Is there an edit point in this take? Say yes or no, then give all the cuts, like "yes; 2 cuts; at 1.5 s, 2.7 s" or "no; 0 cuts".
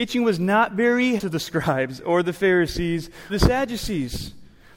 yes; 2 cuts; at 1.2 s, 3.3 s